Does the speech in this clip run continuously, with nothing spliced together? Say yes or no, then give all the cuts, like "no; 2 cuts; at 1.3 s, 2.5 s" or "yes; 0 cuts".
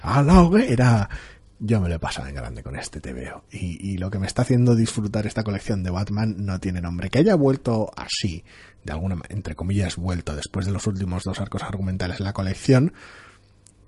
yes; 0 cuts